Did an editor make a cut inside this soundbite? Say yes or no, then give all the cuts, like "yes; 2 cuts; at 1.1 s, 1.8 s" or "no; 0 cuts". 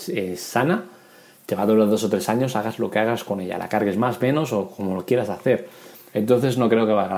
no; 0 cuts